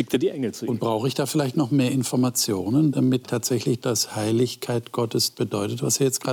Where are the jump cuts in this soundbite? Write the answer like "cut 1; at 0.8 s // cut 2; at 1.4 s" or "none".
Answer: cut 1; at 3.2 s // cut 2; at 3.8 s // cut 3; at 5.3 s